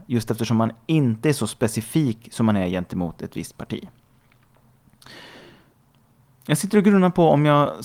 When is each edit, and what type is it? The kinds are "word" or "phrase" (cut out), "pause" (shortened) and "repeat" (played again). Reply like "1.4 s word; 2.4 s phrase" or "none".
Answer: none